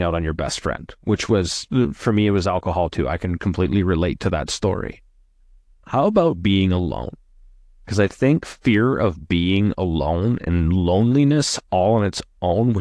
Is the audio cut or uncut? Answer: uncut